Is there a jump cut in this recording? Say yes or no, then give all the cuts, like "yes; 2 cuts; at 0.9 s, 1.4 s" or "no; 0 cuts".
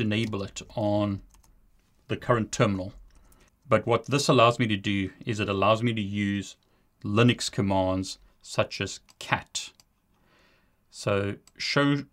no; 0 cuts